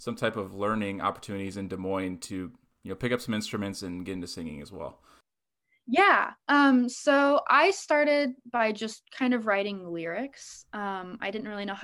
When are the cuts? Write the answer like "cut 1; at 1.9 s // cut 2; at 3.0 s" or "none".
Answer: none